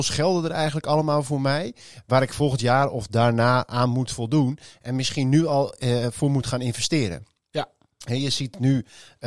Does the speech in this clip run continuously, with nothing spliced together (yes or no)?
yes